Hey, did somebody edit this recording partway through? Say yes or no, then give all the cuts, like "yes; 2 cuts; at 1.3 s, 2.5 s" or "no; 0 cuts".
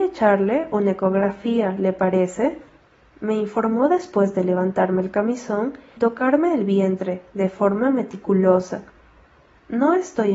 yes; 1 cut; at 6.0 s